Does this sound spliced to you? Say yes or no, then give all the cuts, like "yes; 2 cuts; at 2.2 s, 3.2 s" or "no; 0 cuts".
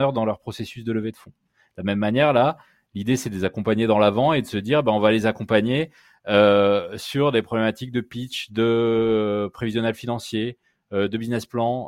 no; 0 cuts